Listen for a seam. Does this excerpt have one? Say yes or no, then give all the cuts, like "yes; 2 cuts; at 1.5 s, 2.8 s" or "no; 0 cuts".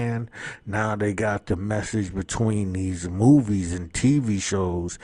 no; 0 cuts